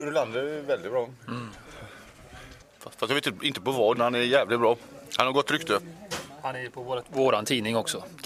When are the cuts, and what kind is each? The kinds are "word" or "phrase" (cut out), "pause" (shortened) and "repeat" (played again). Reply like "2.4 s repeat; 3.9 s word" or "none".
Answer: 2.6 s pause; 4.0 s word